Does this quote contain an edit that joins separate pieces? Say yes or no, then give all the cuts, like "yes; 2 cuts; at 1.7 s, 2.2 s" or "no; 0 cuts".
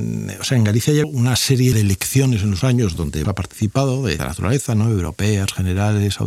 yes; 5 cuts; at 1.0 s, 1.7 s, 2.6 s, 3.2 s, 4.2 s